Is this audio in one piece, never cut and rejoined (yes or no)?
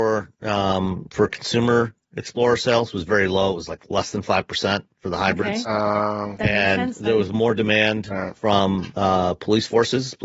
yes